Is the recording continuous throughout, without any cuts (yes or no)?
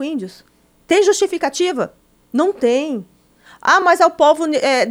yes